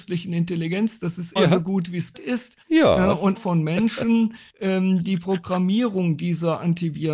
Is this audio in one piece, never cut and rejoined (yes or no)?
no